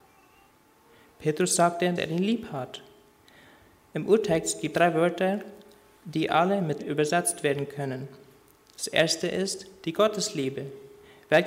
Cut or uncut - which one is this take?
cut